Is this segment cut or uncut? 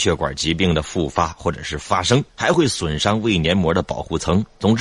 cut